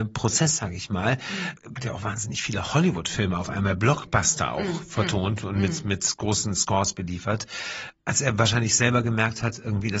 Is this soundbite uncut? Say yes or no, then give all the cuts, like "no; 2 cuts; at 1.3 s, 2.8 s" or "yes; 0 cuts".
no; 1 cut; at 1.8 s